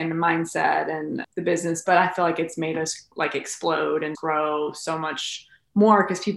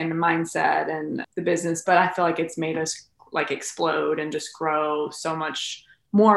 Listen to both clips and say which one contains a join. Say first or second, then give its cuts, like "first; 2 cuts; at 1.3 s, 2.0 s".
first; 2 cuts; at 3.1 s, 4.1 s